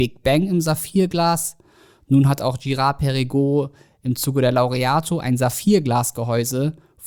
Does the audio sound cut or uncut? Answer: uncut